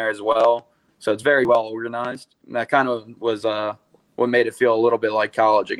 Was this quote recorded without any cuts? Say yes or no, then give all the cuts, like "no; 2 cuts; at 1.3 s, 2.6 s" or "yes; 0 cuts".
yes; 0 cuts